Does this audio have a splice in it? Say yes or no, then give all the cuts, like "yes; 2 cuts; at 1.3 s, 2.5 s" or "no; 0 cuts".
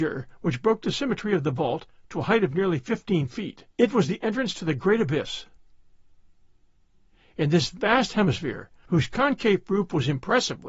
yes; 1 cut; at 3.7 s